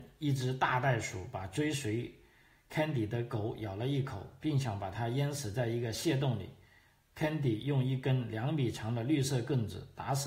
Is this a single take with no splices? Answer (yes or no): yes